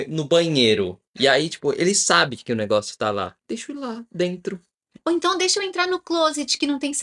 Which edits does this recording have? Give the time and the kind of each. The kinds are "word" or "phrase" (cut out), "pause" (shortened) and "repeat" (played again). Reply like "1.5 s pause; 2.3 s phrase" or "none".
1.1 s pause; 3.4 s pause

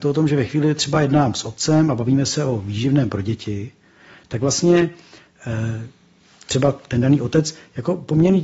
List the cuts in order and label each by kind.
none

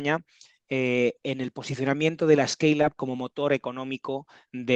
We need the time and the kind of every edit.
none

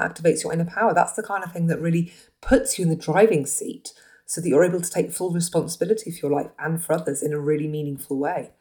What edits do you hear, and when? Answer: none

